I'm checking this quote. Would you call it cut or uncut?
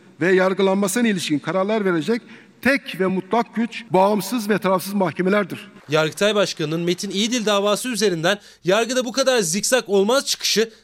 uncut